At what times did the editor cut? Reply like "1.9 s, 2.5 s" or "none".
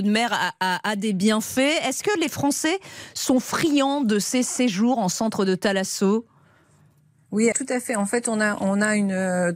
7.5 s